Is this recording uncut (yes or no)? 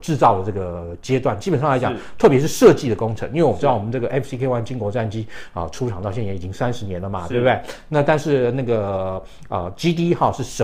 yes